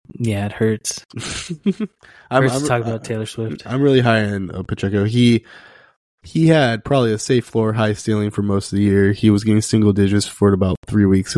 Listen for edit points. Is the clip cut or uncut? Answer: uncut